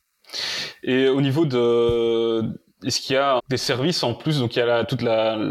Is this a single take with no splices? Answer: no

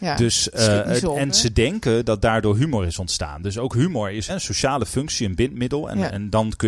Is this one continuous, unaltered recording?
no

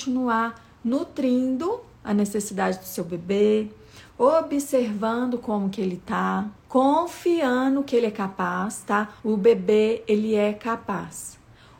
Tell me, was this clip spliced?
yes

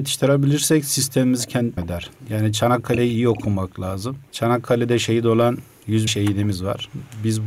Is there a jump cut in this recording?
yes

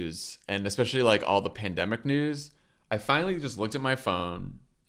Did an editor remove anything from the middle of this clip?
no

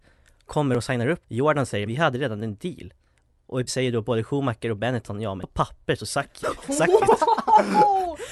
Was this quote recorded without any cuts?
no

